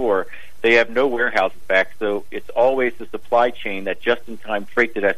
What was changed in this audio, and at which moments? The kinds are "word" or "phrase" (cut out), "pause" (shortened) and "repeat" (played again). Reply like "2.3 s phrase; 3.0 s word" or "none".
1.6 s phrase